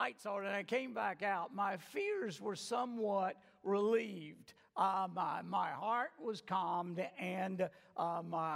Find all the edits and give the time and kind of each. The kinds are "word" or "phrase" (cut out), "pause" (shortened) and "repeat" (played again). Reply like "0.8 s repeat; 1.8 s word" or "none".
none